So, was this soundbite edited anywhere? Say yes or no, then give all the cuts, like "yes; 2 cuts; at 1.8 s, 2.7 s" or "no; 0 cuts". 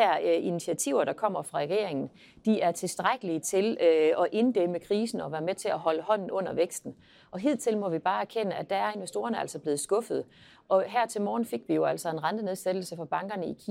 no; 0 cuts